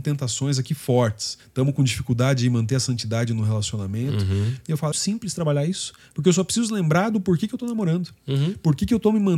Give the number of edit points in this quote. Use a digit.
2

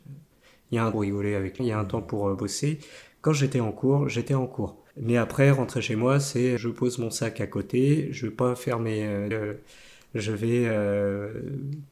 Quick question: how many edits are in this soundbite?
5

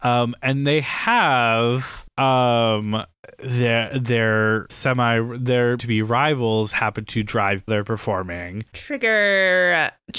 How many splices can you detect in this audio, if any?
4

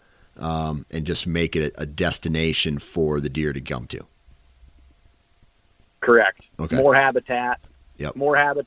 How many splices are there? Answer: 0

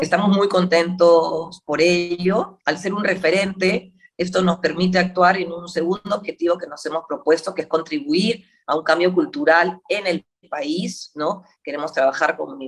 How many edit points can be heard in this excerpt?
1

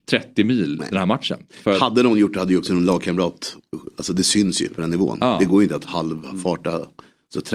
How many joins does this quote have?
0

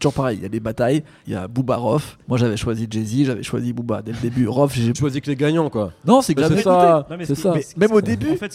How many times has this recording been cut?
4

